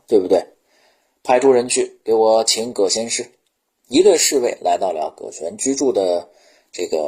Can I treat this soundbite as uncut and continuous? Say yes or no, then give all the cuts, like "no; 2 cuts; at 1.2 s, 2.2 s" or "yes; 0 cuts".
no; 1 cut; at 3.6 s